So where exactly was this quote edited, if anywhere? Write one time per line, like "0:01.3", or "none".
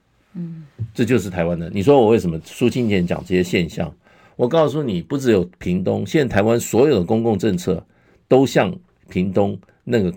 none

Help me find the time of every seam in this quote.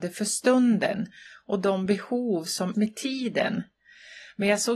0:02.7

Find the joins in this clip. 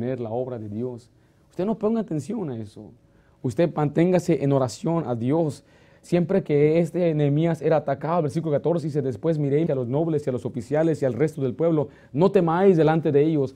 0:09.7

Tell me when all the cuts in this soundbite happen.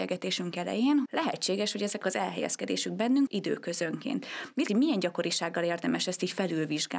0:01.1
0:02.0
0:03.3
0:04.7

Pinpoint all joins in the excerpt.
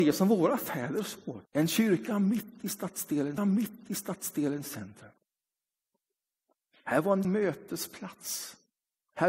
0:01.5
0:03.4
0:07.2

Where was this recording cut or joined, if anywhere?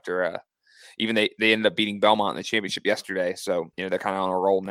0:03.7

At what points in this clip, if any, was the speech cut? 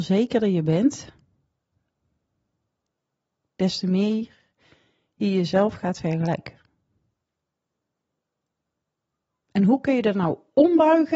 none

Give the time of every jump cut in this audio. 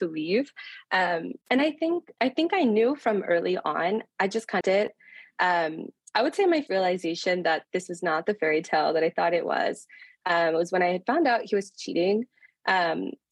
0:01.4
0:02.2
0:04.6
0:06.7

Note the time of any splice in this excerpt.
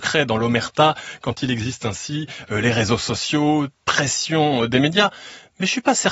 0:03.8

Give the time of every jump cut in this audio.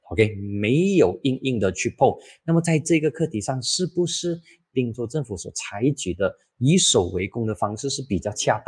none

